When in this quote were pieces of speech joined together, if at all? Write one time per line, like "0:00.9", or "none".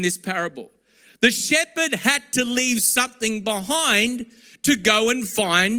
none

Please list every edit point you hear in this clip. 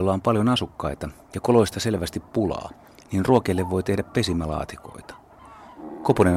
none

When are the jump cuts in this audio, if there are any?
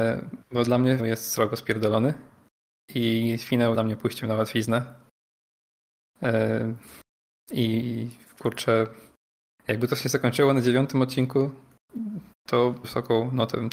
0:01.0
0:03.7
0:12.8

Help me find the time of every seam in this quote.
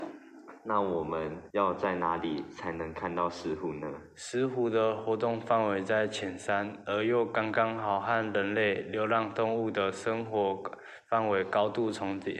0:01.5

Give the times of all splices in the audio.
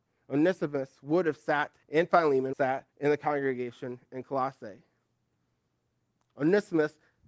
0:01.8
0:02.5
0:02.9

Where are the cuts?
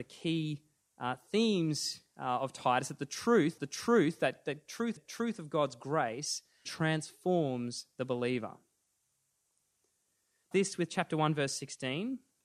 0:03.6
0:05.0
0:06.7
0:10.5

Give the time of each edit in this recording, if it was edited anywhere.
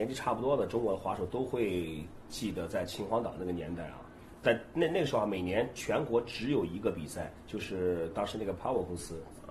0:07.4

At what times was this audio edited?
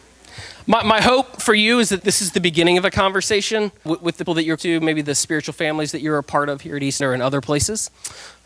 0:01.4
0:02.0
0:03.9
0:04.3
0:04.6
0:07.0

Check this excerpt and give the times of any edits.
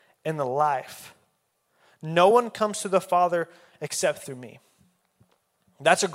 none

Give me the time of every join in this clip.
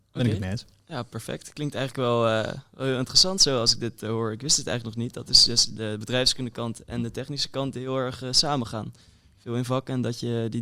none

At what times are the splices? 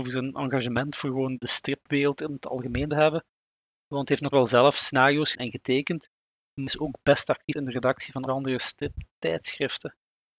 0:01.4
0:02.9
0:04.3
0:05.3
0:06.7
0:07.5
0:08.3

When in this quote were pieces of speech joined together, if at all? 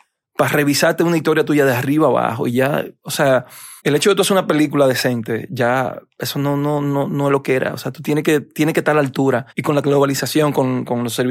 0:03.8
0:09.5

